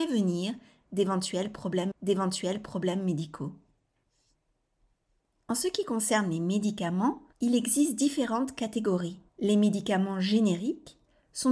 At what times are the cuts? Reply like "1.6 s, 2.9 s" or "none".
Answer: 1.9 s, 7.3 s, 9.3 s